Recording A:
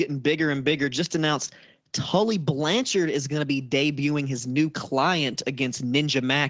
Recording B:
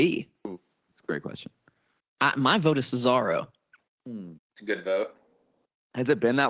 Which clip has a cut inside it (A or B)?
B